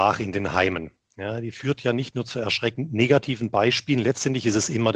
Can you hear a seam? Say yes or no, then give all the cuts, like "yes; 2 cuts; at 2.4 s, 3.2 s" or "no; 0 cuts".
no; 0 cuts